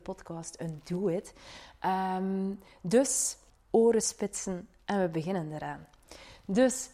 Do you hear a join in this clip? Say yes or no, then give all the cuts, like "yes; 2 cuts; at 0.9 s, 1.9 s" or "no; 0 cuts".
yes; 1 cut; at 3.5 s